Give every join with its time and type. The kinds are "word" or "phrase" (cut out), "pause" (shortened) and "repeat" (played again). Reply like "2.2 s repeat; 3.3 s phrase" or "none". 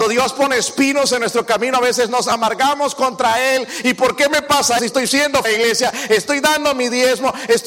4.8 s word; 5.4 s phrase